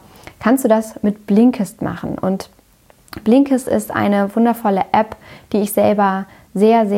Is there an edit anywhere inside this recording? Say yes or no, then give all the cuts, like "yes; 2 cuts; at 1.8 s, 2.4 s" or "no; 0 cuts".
no; 0 cuts